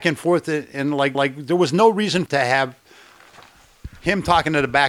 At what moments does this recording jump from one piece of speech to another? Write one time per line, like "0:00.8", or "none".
0:01.1
0:02.3